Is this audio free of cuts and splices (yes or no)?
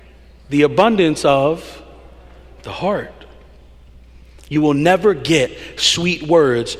yes